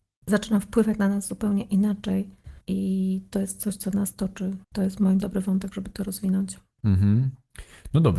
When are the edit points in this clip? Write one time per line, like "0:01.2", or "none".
0:02.6
0:04.6
0:05.2